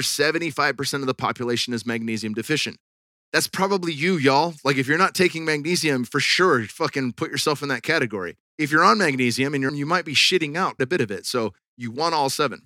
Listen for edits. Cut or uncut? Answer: cut